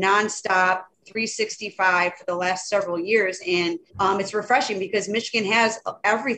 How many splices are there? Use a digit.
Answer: 1